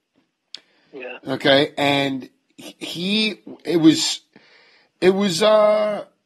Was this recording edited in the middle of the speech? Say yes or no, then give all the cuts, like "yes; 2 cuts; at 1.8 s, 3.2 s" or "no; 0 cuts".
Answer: no; 0 cuts